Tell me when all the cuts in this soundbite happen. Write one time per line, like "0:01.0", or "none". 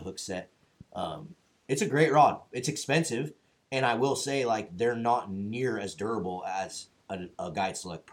none